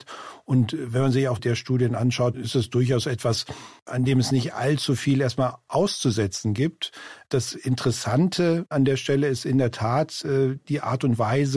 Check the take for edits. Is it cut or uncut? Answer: cut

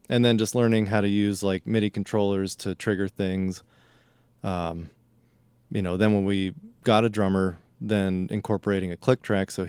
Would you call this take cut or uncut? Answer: uncut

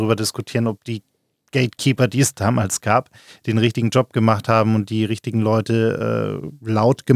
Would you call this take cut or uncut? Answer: uncut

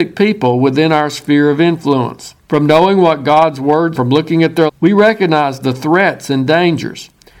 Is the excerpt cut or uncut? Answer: cut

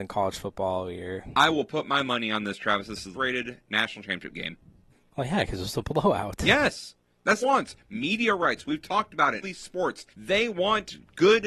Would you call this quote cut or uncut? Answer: cut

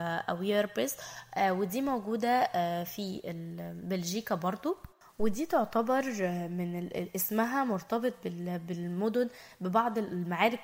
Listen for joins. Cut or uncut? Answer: uncut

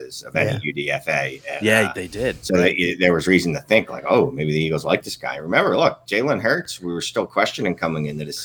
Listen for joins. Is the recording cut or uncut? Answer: uncut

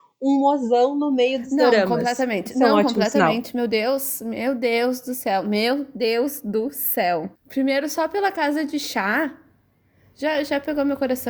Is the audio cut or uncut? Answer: cut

